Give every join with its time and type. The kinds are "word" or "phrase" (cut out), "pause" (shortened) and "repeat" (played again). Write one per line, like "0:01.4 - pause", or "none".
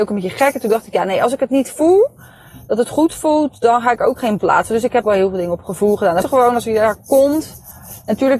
0:04.4 - word
0:05.0 - word
0:06.2 - word